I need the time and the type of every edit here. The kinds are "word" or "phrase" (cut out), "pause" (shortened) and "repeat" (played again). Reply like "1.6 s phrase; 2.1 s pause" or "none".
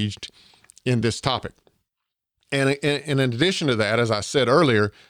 none